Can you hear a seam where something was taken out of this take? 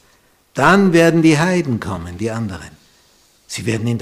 no; 0 cuts

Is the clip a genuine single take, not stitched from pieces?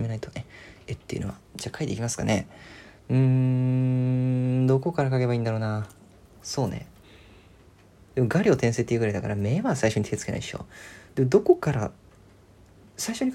no; 1 cut; at 11.1 s

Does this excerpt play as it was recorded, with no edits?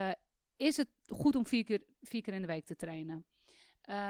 yes; 0 cuts

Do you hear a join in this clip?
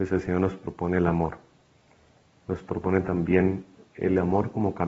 no; 0 cuts

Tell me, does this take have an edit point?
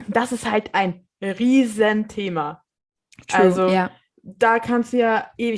no; 0 cuts

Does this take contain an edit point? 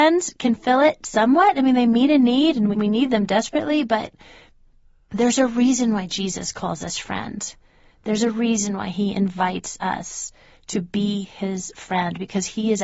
yes; 1 cut; at 2.7 s

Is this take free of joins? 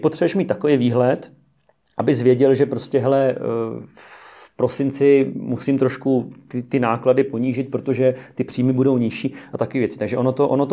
yes; 0 cuts

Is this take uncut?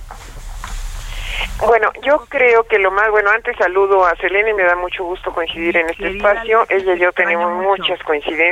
yes; 0 cuts

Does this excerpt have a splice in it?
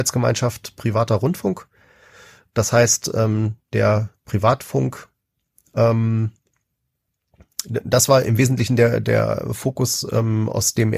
no; 0 cuts

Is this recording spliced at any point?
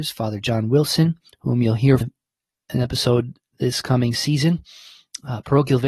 yes; 1 cut; at 2.0 s

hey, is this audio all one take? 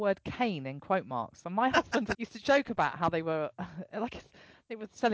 no; 1 cut; at 2.1 s

